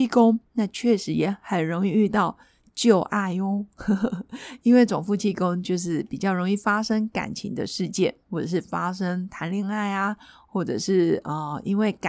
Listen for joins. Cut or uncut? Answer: uncut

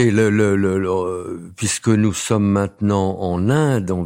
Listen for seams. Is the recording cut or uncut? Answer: uncut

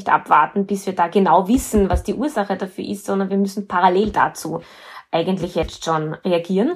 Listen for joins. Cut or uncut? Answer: uncut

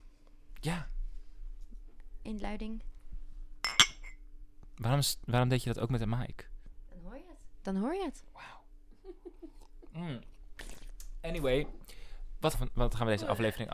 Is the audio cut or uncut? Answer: cut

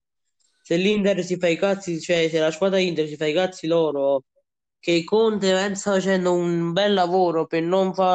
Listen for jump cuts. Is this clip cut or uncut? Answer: uncut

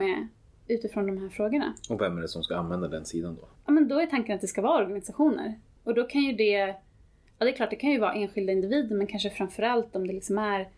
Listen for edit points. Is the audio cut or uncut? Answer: uncut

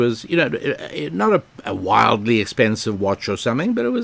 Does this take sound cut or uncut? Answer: uncut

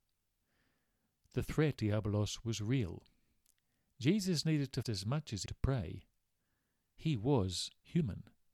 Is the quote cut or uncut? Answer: cut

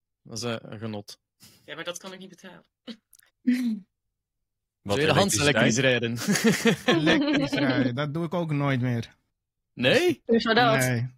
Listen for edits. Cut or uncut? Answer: uncut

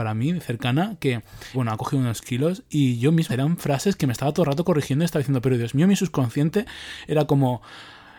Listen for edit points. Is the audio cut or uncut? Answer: cut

